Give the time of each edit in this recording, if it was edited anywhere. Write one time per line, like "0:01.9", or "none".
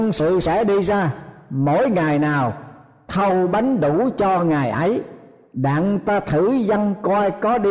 none